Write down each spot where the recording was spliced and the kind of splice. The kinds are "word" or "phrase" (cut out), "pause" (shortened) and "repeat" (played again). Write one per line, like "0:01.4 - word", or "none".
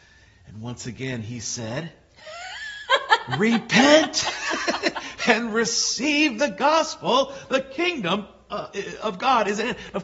none